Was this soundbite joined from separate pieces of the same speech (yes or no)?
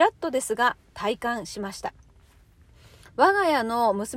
no